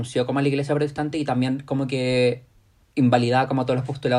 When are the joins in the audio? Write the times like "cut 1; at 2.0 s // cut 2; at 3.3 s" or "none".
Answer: none